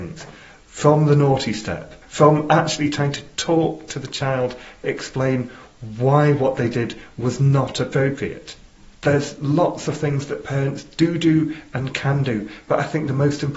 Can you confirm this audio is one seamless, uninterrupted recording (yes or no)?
no